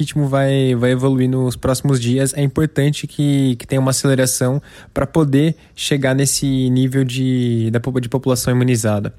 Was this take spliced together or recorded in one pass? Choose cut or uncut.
uncut